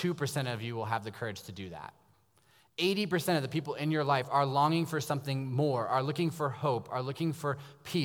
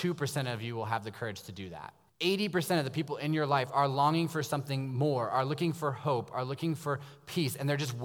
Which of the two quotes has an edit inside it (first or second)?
second